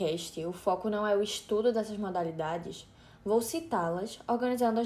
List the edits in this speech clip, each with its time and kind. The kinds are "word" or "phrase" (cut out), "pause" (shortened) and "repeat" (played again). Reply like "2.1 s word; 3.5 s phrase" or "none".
none